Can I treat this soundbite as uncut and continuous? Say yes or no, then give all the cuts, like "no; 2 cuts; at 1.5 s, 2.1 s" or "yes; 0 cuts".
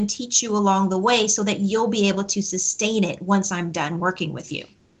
yes; 0 cuts